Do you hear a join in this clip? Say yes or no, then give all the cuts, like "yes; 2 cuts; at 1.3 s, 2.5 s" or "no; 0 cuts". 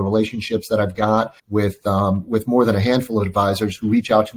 yes; 1 cut; at 1.4 s